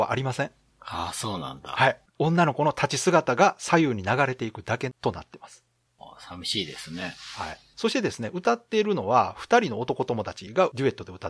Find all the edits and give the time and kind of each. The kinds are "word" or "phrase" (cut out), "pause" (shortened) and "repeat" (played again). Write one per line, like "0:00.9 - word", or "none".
none